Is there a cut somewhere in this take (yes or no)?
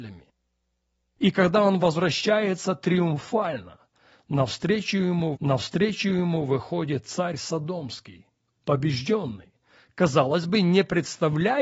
yes